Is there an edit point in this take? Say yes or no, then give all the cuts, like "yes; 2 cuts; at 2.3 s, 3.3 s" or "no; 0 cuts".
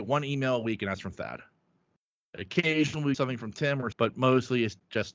yes; 2 cuts; at 3.1 s, 3.9 s